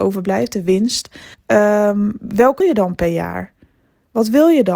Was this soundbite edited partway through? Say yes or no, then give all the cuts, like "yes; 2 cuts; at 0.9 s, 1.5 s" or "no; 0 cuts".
yes; 2 cuts; at 1.3 s, 2.6 s